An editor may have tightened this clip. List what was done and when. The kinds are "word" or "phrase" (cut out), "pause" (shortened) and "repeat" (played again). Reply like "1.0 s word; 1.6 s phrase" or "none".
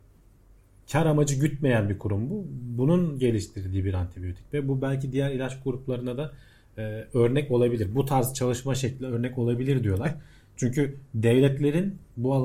none